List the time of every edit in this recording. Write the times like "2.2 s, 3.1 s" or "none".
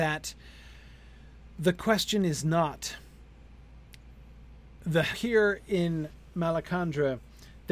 5.1 s